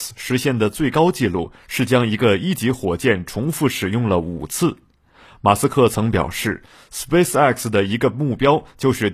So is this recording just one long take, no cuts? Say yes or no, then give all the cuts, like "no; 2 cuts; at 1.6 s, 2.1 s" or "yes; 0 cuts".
yes; 0 cuts